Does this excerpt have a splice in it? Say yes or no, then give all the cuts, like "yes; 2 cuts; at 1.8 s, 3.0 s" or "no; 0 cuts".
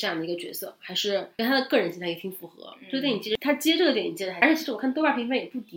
yes; 1 cut; at 1.3 s